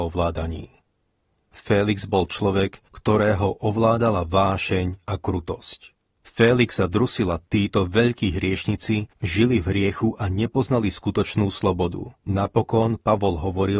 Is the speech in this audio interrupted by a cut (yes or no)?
yes